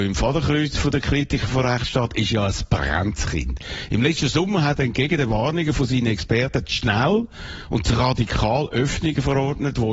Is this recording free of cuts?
yes; 0 cuts

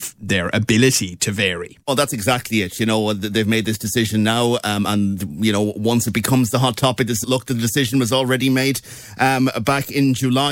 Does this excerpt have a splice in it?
yes; 2 cuts; at 1.8 s, 7.2 s

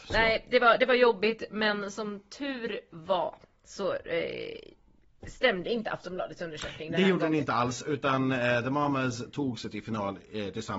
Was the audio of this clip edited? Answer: no; 0 cuts

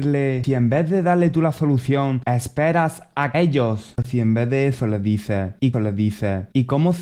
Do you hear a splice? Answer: yes; 2 cuts; at 3.3 s, 5.7 s

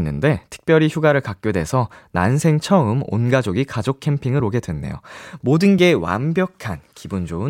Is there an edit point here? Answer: no; 0 cuts

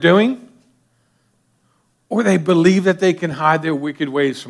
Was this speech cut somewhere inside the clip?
no; 0 cuts

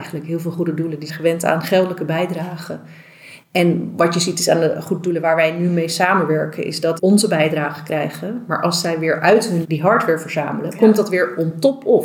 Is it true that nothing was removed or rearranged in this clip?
no; 3 cuts; at 1.1 s, 7.0 s, 9.6 s

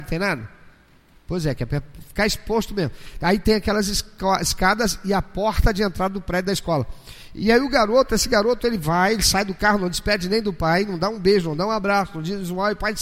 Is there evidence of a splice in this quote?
no; 0 cuts

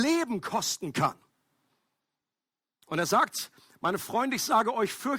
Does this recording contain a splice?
no; 0 cuts

